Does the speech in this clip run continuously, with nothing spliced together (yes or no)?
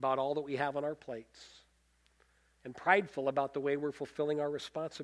yes